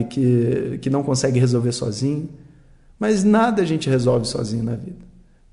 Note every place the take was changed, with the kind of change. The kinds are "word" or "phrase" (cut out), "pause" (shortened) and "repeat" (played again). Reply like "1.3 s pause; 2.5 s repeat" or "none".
none